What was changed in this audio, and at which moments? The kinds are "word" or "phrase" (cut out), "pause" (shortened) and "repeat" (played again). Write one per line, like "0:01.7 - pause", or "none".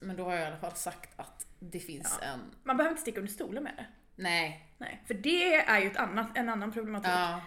none